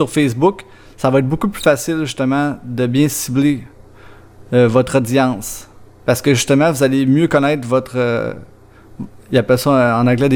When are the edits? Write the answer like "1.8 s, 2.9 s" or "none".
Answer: none